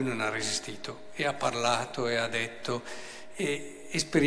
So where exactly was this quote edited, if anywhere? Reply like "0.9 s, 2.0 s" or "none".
none